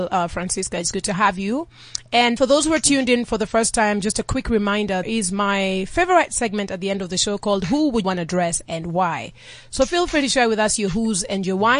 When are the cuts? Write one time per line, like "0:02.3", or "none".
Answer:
0:02.4
0:05.0
0:08.0